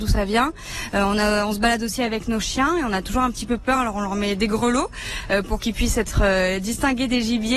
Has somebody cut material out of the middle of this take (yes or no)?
no